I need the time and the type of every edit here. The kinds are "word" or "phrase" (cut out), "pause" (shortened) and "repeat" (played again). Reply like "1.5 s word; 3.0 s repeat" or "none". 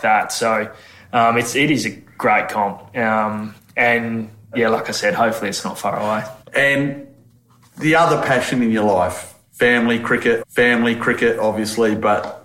3.6 s pause; 6.4 s pause; 10.4 s repeat